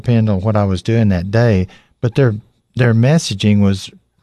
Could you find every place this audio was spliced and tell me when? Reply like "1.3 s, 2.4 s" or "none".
none